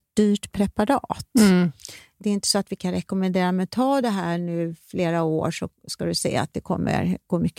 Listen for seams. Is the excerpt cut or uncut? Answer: uncut